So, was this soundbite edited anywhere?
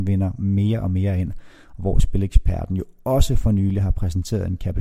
no; 0 cuts

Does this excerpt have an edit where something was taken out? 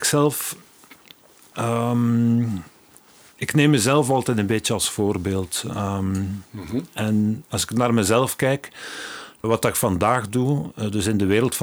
yes; 1 cut; at 9.4 s

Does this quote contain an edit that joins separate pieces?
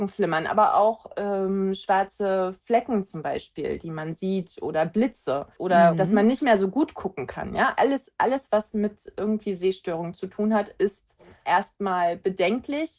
no; 0 cuts

